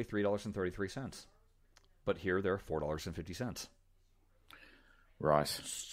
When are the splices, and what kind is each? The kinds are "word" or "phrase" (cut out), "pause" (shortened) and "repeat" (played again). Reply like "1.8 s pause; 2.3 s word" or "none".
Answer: none